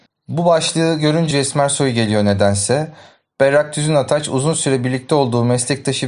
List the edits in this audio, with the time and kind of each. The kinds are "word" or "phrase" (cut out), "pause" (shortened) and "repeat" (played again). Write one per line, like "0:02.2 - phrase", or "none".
0:01.3 - phrase

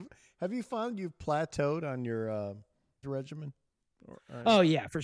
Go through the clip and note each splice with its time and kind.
0:03.0 - word

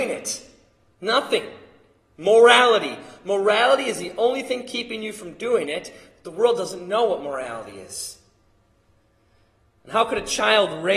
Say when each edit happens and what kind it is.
none

